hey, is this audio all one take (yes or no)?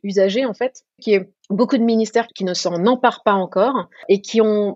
no